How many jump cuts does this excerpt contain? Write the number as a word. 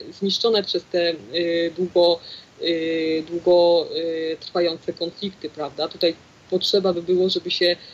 zero